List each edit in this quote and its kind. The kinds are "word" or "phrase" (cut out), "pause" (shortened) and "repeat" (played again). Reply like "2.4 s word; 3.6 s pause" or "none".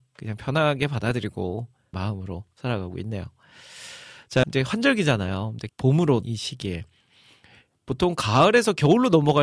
1.9 s word; 4.4 s word; 5.7 s word; 6.2 s word